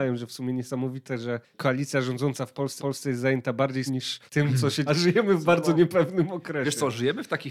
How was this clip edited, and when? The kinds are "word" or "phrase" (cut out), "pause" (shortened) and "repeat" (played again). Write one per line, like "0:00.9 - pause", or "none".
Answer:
0:02.8 - repeat
0:03.9 - word
0:04.3 - pause
0:04.9 - phrase